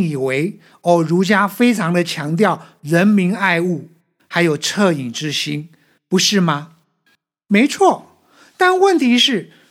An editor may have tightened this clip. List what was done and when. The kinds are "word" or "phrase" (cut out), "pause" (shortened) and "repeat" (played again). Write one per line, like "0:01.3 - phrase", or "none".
none